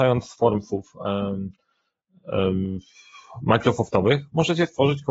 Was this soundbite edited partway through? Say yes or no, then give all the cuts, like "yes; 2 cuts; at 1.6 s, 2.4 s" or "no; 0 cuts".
no; 0 cuts